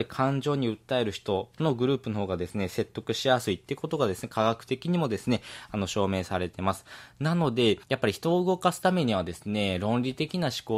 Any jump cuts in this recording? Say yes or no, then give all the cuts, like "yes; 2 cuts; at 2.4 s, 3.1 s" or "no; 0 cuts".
yes; 1 cut; at 7.8 s